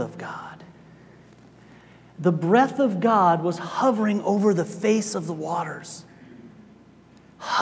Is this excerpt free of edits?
yes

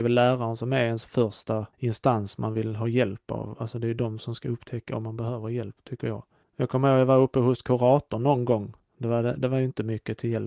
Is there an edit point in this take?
yes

